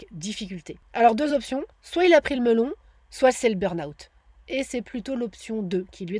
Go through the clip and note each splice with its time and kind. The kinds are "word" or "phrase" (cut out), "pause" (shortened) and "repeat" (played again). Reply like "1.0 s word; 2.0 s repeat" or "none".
none